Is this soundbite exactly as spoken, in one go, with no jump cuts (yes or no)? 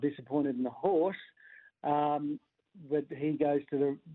yes